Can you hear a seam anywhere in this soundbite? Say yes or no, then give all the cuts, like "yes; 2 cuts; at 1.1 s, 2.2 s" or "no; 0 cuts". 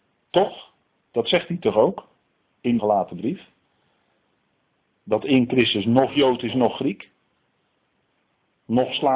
yes; 1 cut; at 2.8 s